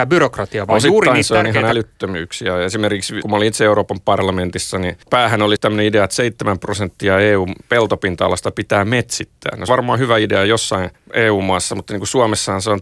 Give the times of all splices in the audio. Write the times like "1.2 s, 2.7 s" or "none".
3.2 s, 5.0 s, 5.6 s, 9.7 s, 10.9 s